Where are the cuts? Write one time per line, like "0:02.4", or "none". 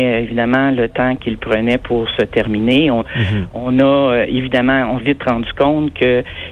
0:01.2
0:03.0
0:05.0